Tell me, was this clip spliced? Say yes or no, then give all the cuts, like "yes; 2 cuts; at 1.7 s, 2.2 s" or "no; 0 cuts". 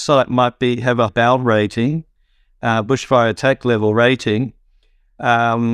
yes; 1 cut; at 1.1 s